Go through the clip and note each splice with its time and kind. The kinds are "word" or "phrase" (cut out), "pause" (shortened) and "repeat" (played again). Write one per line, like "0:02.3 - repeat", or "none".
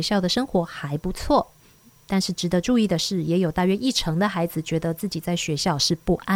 none